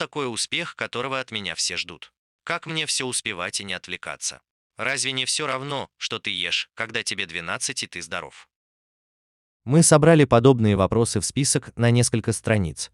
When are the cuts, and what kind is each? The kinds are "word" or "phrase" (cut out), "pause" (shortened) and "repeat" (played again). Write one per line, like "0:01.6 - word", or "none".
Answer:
none